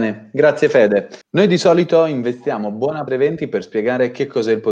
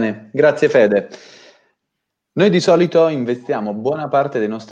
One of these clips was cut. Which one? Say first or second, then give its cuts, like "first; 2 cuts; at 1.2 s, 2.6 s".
first; 2 cuts; at 1.2 s, 3.1 s